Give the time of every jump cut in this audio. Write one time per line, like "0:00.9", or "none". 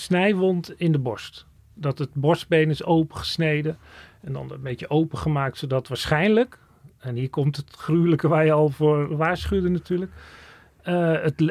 none